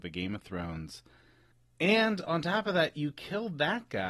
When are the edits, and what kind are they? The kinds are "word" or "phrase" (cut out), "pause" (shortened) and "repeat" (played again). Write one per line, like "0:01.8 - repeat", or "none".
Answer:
none